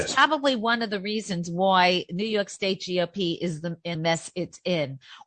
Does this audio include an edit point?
yes; 1 cut; at 3.9 s

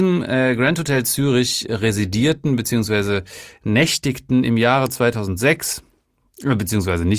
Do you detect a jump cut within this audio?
no; 0 cuts

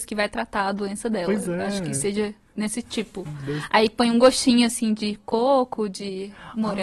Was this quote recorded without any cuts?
yes; 0 cuts

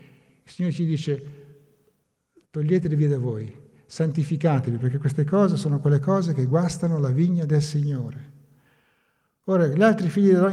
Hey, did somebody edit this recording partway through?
no; 0 cuts

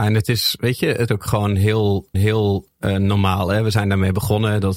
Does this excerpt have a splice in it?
yes; 2 cuts; at 1.1 s, 2.1 s

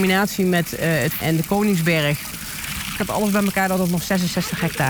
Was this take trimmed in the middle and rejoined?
yes; 2 cuts; at 1.2 s, 3.0 s

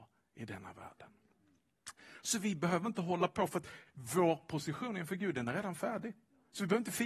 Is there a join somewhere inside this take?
no; 0 cuts

